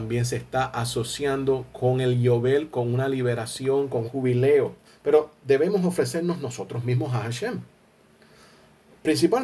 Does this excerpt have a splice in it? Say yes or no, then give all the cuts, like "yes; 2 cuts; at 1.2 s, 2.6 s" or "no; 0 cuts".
yes; 2 cuts; at 4.0 s, 4.8 s